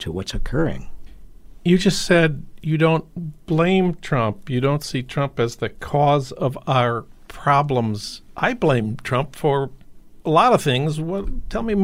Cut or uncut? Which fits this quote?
uncut